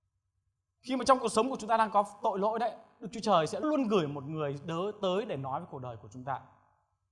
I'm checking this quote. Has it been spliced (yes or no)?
yes